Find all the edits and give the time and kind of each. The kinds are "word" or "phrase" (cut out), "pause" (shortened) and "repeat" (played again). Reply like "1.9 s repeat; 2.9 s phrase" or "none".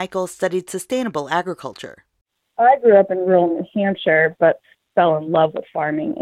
none